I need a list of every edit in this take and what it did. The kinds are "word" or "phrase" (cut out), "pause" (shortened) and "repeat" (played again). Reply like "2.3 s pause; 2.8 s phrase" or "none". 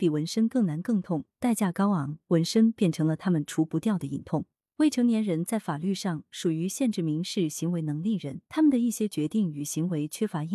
8.4 s pause